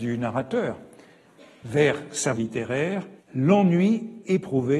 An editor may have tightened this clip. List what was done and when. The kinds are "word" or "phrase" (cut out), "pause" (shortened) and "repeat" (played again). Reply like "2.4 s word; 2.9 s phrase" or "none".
2.4 s word; 3.2 s pause